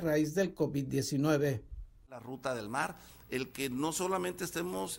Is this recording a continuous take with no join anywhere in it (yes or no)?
yes